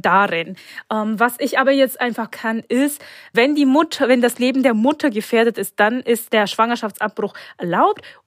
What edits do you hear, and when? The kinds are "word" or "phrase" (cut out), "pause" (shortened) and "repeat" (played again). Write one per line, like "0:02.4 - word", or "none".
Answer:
0:02.3 - phrase
0:03.3 - word